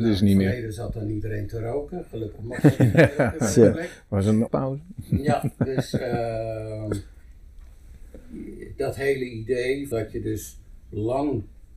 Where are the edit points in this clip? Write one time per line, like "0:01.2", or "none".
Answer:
0:04.5
0:09.9